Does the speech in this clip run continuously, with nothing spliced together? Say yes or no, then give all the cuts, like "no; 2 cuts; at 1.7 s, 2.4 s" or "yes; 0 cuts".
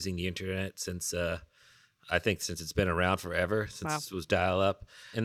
yes; 0 cuts